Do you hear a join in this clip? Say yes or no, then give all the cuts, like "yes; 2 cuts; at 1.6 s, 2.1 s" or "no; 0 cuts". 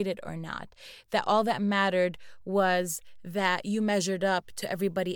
no; 0 cuts